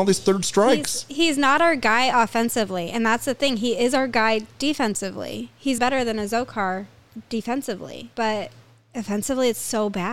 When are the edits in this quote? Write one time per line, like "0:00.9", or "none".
0:05.8
0:08.1